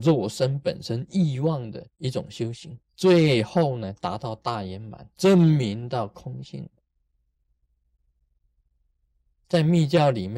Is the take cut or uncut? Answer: cut